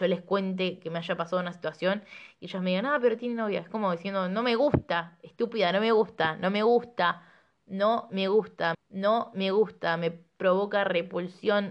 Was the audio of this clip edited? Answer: yes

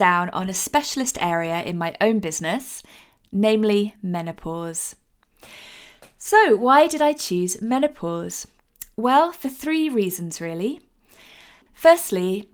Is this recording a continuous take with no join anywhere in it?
yes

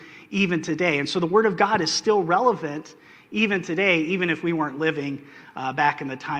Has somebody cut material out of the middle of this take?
no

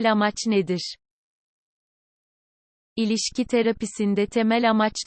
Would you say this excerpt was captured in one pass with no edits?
yes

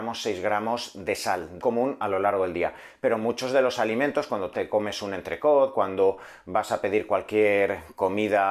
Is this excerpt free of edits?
no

